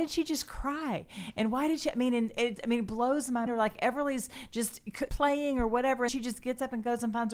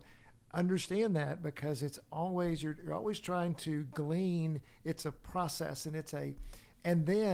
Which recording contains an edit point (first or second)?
first